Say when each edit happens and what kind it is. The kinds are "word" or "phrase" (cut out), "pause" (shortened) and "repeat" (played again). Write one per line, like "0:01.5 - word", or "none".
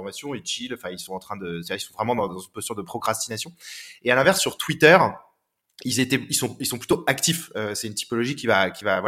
none